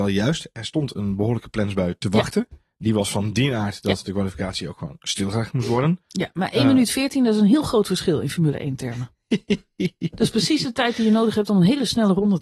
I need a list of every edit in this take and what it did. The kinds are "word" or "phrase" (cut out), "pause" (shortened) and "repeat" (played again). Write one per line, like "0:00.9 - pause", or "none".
none